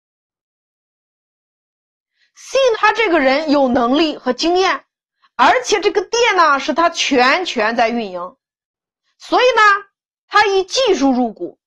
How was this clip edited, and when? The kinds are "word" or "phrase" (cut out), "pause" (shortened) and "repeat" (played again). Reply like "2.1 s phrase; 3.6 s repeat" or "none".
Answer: 2.7 s word